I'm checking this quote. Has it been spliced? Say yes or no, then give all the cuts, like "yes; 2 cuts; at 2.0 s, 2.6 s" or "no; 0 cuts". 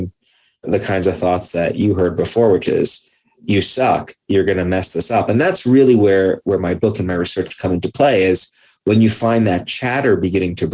no; 0 cuts